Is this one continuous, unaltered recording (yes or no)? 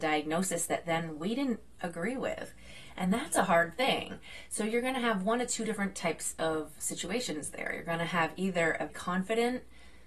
no